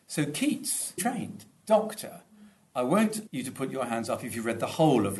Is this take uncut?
no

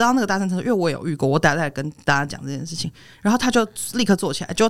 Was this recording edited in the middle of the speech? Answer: no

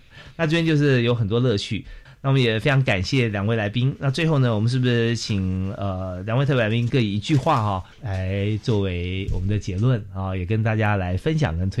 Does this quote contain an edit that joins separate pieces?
yes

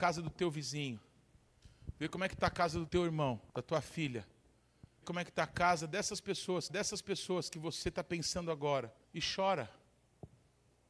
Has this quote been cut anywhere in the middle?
yes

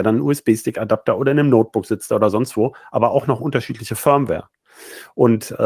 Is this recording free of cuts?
yes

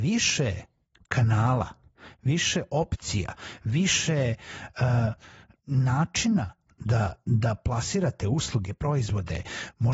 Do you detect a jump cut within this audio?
no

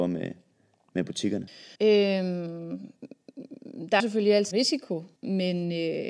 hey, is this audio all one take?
no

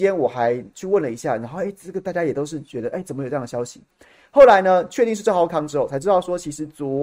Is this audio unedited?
yes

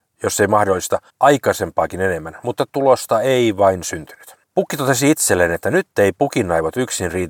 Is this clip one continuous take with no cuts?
no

